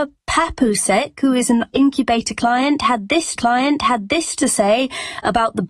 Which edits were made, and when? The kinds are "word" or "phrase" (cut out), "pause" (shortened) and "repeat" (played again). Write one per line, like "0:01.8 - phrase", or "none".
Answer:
0:01.7 - word
0:03.4 - repeat